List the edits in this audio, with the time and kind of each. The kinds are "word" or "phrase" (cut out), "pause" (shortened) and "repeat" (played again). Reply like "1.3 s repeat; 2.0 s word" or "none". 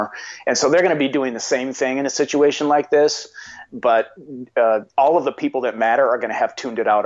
4.9 s pause